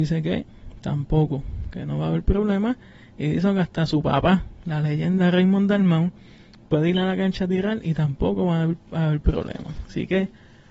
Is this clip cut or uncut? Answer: uncut